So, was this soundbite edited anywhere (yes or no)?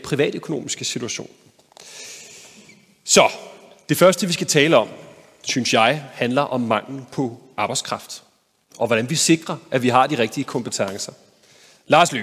no